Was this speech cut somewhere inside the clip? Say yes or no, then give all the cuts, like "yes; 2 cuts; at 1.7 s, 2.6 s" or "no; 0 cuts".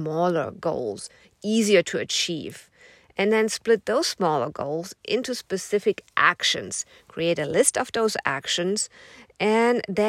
no; 0 cuts